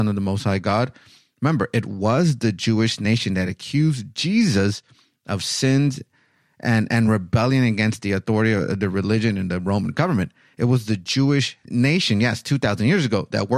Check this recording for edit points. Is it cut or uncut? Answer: uncut